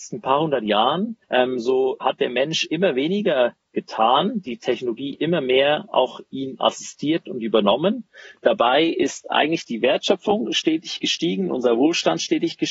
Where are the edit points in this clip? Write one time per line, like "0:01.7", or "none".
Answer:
0:01.2
0:02.0